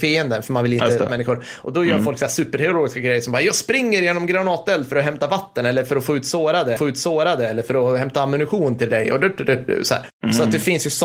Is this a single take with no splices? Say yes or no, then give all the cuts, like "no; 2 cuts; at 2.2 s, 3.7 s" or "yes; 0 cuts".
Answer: no; 3 cuts; at 1.1 s, 6.8 s, 9.7 s